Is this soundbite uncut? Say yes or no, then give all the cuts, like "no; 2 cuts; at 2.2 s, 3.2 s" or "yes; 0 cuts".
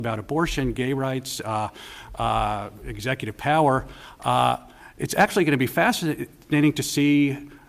yes; 0 cuts